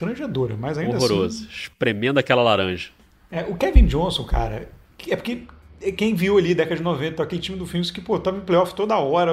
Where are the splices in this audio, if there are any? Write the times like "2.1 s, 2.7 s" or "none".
none